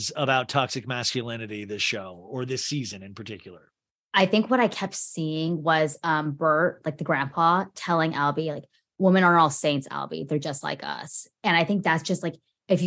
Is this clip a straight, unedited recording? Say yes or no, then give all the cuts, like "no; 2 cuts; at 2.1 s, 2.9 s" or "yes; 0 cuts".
yes; 0 cuts